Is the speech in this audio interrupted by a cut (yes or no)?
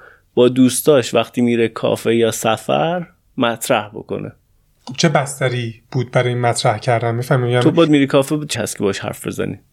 yes